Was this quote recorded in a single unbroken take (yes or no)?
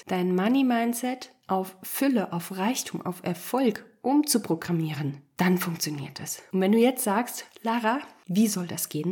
yes